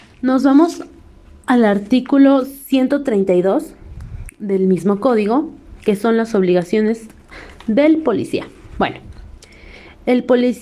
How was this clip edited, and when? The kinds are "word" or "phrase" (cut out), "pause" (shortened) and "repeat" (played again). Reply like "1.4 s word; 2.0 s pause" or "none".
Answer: none